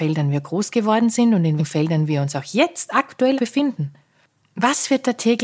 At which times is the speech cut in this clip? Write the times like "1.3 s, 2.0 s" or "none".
1.6 s, 3.4 s